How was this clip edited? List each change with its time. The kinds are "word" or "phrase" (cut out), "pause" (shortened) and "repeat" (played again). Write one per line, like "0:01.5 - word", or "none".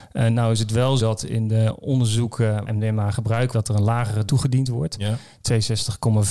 0:01.0 - word
0:02.7 - word
0:03.5 - word
0:04.3 - word